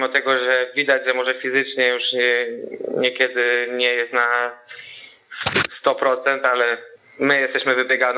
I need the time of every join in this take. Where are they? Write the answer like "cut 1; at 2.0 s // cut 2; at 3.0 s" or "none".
cut 1; at 7.0 s